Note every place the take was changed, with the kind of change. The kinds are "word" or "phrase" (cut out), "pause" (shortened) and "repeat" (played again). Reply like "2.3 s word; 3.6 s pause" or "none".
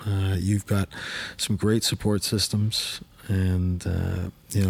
none